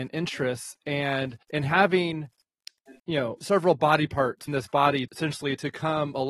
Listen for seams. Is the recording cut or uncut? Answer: cut